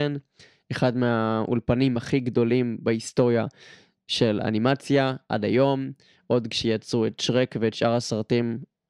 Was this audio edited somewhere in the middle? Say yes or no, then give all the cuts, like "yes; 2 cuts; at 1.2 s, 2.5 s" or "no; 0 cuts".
no; 0 cuts